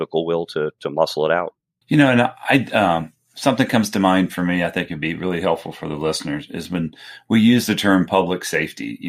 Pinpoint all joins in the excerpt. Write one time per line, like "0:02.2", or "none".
none